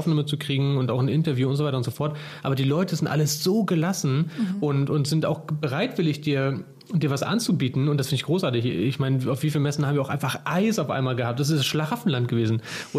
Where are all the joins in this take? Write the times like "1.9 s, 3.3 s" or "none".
none